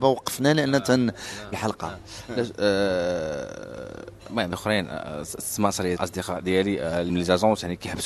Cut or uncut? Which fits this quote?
cut